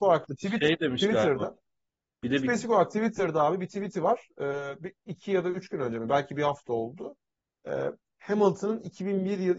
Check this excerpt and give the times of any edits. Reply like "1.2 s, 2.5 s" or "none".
none

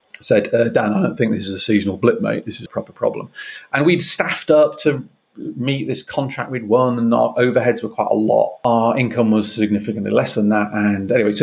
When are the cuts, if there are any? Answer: 2.7 s

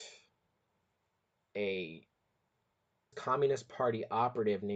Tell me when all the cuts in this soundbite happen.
3.1 s

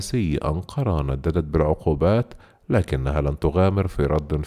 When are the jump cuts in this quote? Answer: none

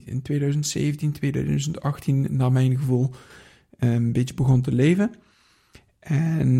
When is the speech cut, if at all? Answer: none

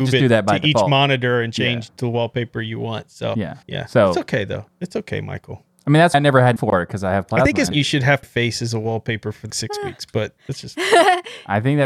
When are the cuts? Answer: 3.6 s, 6.1 s, 6.6 s, 7.7 s, 8.2 s, 9.5 s

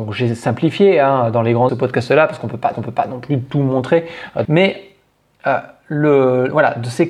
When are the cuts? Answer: 1.7 s, 2.7 s, 4.4 s

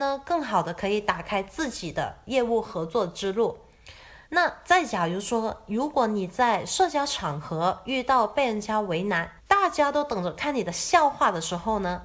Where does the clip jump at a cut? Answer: 4.2 s, 9.4 s

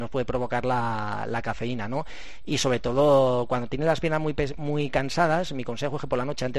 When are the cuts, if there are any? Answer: none

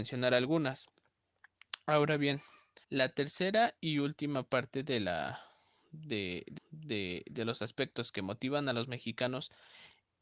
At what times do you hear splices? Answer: 2.8 s, 6.6 s

